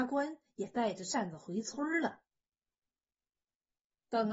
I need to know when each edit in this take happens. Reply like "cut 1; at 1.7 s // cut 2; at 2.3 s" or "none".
none

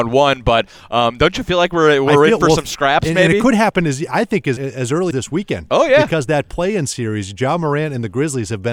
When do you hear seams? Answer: cut 1; at 4.6 s // cut 2; at 5.1 s

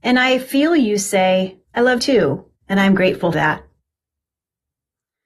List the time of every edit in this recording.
cut 1; at 1.6 s // cut 2; at 2.0 s // cut 3; at 2.6 s // cut 4; at 3.3 s

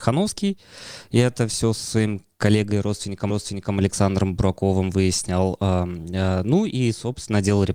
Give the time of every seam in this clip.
cut 1; at 3.3 s

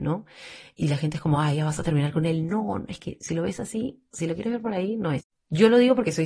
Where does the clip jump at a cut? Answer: none

